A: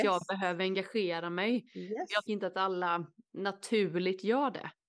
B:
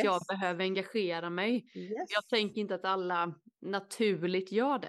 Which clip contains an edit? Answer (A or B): A